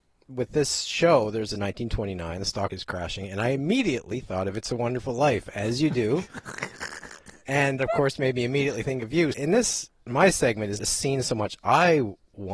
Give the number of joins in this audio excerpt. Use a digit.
5